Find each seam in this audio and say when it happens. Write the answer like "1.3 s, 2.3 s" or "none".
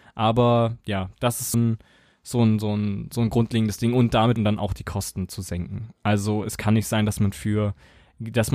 1.5 s, 4.4 s